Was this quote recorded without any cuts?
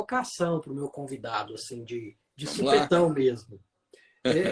no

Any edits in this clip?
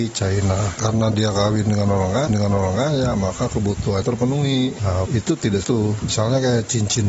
yes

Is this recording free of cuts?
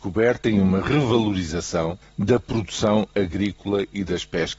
no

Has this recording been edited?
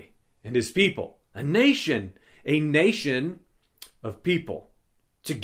no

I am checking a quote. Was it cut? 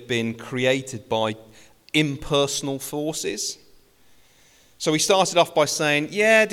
no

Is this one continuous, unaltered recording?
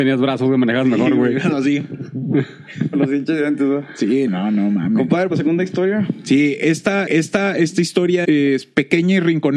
no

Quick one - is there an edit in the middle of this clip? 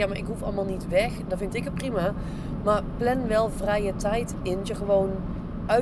yes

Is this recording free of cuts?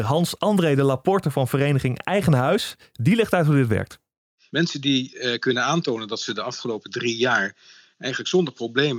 yes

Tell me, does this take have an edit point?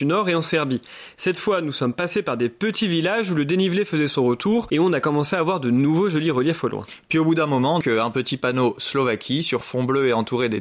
yes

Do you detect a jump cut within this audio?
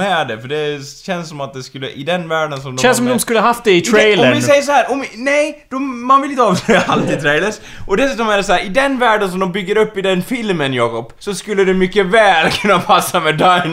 yes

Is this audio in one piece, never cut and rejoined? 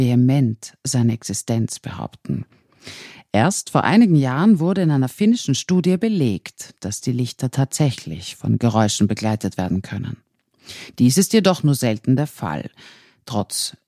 yes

